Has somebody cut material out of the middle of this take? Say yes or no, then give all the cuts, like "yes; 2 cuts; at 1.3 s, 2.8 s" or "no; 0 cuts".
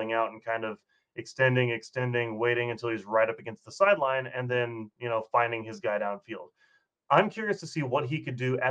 no; 0 cuts